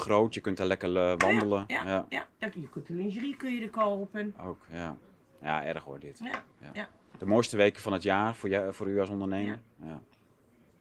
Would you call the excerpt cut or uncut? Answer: uncut